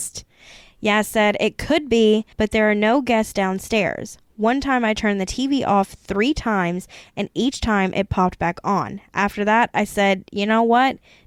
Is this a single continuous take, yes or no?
no